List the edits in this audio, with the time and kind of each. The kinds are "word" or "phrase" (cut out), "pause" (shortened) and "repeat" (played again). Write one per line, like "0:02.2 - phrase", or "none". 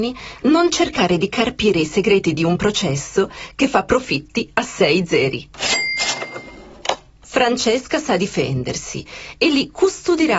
none